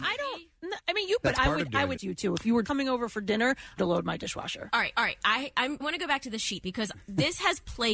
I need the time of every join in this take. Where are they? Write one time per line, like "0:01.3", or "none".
0:01.2
0:02.0
0:02.6
0:03.8
0:05.0
0:05.8
0:06.6